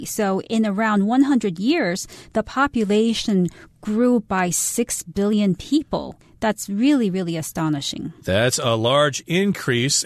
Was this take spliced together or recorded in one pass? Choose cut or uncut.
uncut